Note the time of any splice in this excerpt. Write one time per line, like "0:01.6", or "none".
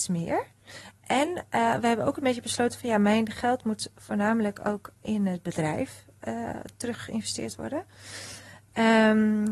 none

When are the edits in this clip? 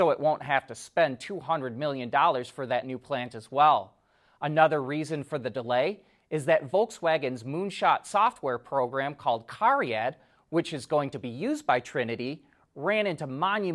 none

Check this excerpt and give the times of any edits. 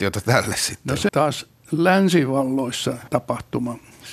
0:01.1
0:03.1

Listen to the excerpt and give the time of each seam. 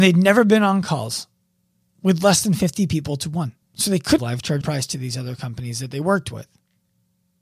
0:01.7
0:03.6
0:04.2
0:04.6

